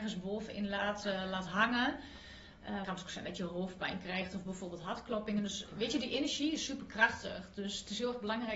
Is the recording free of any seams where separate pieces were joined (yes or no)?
no